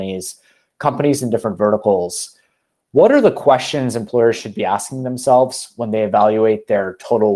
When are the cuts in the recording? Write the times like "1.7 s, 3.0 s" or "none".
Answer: none